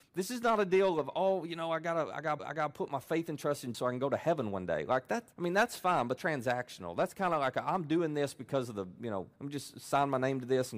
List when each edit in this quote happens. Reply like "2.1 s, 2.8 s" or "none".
2.4 s, 3.7 s, 5.3 s, 6.2 s, 9.3 s